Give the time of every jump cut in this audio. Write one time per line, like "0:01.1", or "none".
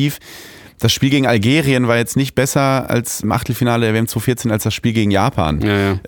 0:03.2